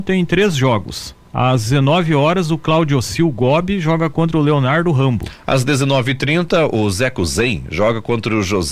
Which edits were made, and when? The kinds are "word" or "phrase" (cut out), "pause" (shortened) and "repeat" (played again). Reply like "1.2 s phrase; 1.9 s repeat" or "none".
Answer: 1.3 s pause